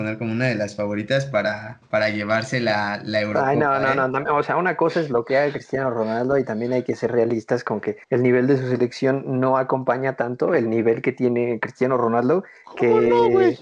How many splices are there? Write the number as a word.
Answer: one